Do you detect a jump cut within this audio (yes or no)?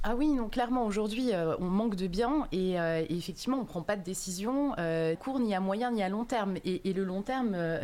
yes